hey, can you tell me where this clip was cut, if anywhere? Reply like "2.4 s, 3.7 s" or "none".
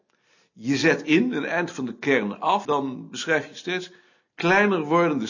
2.6 s